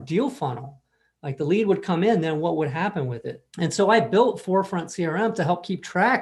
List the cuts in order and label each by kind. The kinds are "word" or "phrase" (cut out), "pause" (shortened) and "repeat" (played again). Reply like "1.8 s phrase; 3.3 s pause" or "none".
3.5 s pause